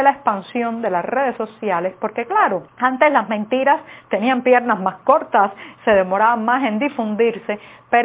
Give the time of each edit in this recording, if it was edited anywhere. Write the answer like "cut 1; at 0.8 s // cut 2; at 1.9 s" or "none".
cut 1; at 2.7 s